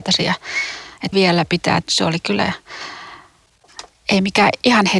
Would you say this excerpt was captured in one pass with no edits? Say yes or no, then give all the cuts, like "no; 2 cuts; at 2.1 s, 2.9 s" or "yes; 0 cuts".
no; 2 cuts; at 1.1 s, 1.8 s